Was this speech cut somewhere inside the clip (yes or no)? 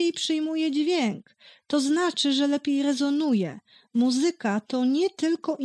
no